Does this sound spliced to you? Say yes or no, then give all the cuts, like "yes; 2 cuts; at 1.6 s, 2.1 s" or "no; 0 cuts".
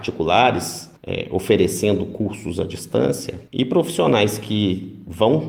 yes; 2 cuts; at 1.0 s, 3.5 s